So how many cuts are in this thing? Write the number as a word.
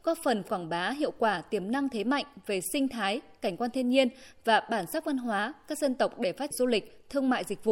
one